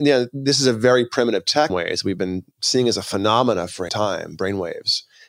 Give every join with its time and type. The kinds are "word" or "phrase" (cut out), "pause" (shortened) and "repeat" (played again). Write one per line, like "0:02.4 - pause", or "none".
0:01.7 - phrase
0:02.5 - pause
0:03.9 - word